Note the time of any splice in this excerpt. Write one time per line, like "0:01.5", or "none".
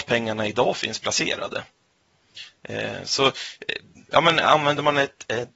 none